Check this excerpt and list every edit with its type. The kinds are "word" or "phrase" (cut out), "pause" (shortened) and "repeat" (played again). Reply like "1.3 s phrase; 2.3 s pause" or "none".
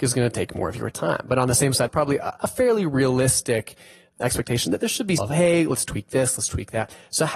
1.9 s phrase; 5.2 s phrase